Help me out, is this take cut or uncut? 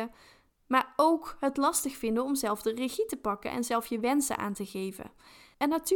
uncut